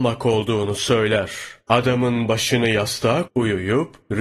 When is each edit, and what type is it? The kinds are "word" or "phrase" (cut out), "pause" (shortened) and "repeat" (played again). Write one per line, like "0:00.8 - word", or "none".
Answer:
0:01.6 - pause
0:03.3 - word